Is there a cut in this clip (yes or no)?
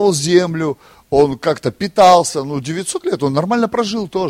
no